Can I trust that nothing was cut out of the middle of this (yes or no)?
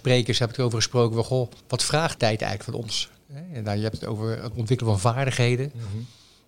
no